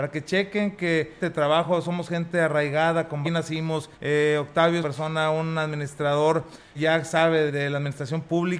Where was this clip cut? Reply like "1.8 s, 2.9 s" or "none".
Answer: 1.2 s, 3.2 s, 3.9 s, 4.8 s, 6.7 s, 7.5 s